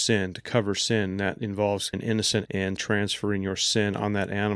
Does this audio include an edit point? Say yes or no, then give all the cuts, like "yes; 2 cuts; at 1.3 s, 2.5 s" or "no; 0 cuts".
yes; 3 cuts; at 1.9 s, 2.5 s, 2.8 s